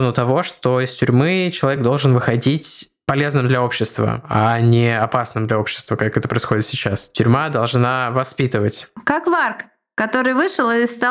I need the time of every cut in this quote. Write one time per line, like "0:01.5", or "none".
none